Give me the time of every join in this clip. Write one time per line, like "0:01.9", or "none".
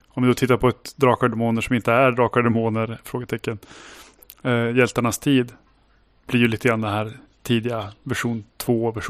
none

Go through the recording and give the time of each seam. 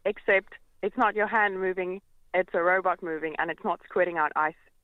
none

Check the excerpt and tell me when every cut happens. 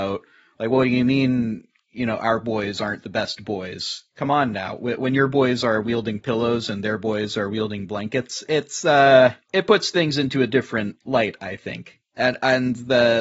0:09.4
0:12.1

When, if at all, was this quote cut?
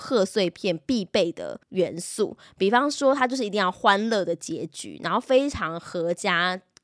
0:01.6

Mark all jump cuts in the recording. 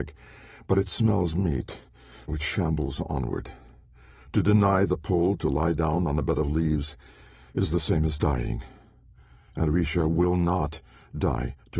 0:02.3

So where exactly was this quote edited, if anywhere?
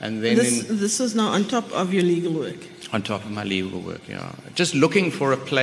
none

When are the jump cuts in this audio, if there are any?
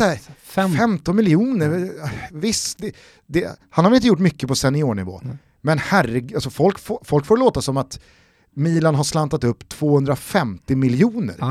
0:02.8

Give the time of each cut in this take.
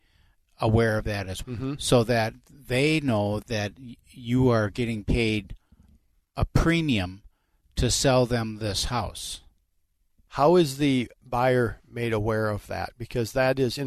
0:01.4
0:03.4

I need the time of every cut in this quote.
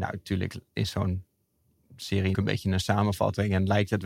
0:02.3

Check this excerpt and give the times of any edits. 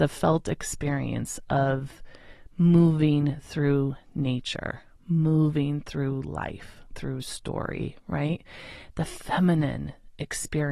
0:06.9

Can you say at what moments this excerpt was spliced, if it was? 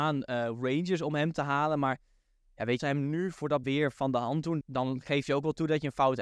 0:02.8
0:03.6
0:04.6

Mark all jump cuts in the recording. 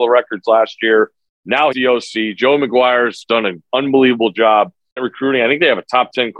0:01.7
0:03.3
0:05.0

